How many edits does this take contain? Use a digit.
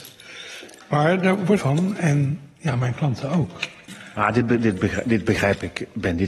1